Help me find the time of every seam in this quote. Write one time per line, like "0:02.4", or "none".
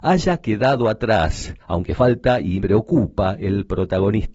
0:01.6
0:02.6